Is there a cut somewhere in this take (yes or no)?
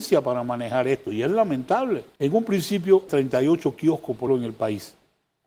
yes